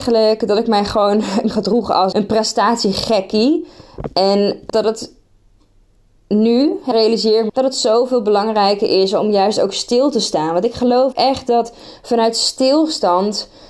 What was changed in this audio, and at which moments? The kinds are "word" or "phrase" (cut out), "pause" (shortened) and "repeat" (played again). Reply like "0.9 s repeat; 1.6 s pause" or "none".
1.5 s word; 2.1 s word; 4.7 s word; 6.9 s word; 7.5 s word; 11.1 s word